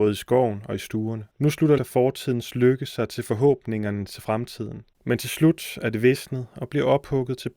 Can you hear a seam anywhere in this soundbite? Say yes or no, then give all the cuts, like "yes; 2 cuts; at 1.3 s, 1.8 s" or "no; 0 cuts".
yes; 3 cuts; at 1.3 s, 1.8 s, 4.9 s